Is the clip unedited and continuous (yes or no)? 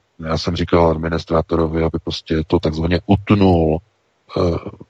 yes